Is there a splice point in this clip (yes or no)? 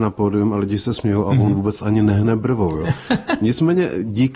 no